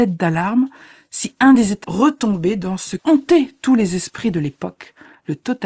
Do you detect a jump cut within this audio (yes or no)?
yes